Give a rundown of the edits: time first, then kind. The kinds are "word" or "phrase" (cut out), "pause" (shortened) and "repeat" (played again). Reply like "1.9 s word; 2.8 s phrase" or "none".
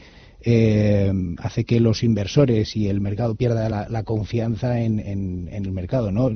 none